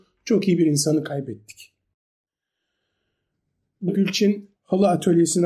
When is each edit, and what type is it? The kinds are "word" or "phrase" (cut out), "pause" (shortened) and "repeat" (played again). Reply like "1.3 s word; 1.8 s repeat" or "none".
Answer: 3.9 s word; 4.5 s pause